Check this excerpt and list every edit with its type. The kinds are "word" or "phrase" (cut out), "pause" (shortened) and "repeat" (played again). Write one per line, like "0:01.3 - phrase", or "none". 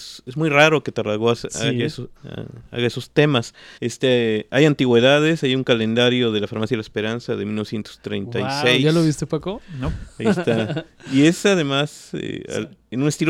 0:02.2 - pause
0:03.8 - pause